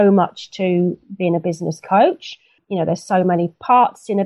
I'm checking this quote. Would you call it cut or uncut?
uncut